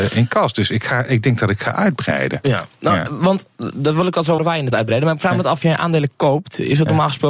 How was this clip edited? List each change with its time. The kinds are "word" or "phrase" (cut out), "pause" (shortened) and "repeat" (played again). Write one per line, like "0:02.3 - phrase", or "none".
0:04.4 - word
0:04.7 - word
0:05.6 - word